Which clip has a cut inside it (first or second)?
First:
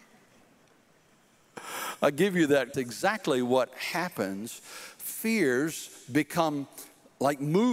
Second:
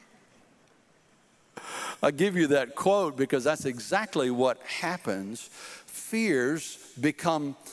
first